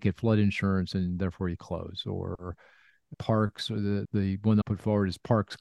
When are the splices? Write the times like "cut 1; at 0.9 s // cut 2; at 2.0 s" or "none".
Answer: cut 1; at 1.6 s // cut 2; at 3.1 s // cut 3; at 4.0 s // cut 4; at 4.6 s